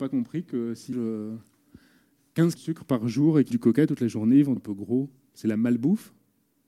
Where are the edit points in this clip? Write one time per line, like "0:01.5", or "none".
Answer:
0:00.9
0:02.6
0:03.5
0:04.6